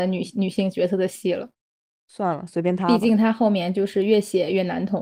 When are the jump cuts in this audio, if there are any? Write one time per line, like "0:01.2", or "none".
0:01.8